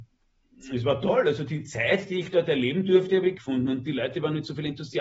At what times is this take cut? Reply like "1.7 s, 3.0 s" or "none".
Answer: 3.4 s